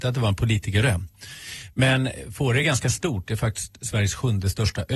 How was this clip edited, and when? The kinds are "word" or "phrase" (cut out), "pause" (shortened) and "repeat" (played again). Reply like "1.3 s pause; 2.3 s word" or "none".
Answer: none